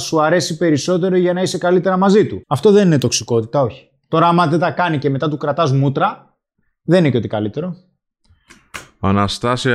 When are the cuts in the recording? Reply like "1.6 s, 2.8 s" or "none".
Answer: 2.4 s, 6.6 s